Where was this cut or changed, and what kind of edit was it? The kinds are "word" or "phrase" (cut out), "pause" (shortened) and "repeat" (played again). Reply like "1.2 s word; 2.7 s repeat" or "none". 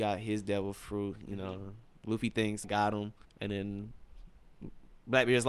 2.6 s phrase; 3.2 s pause